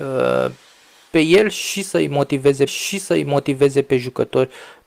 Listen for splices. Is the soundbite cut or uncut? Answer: cut